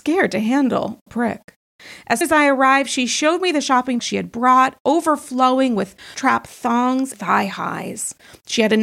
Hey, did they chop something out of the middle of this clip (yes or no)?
yes